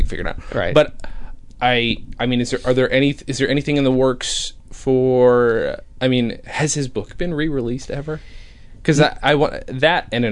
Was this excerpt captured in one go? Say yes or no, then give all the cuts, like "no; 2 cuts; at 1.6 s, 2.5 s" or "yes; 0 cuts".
yes; 0 cuts